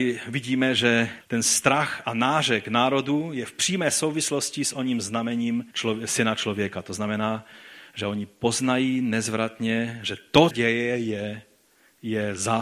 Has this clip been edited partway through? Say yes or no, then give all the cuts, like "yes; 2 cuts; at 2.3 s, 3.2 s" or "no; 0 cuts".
yes; 3 cuts; at 1.2 s, 5.7 s, 10.5 s